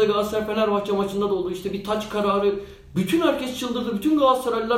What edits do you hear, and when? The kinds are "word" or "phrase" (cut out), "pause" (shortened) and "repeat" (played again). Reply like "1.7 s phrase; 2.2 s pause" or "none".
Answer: none